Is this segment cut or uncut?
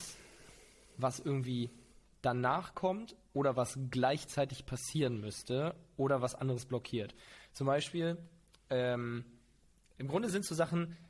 uncut